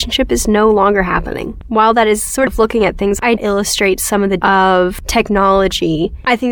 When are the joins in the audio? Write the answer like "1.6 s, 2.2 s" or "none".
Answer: 2.5 s, 3.4 s, 4.4 s